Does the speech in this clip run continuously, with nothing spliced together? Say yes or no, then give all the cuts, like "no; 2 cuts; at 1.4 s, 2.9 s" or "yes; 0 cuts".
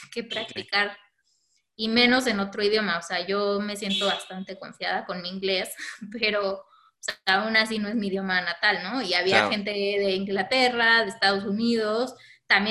yes; 0 cuts